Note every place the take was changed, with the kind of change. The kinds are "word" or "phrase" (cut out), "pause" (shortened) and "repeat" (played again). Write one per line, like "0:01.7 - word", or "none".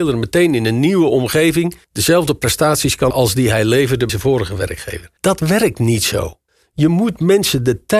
0:01.8 - pause
0:03.1 - word
0:04.1 - word
0:05.2 - pause
0:06.5 - pause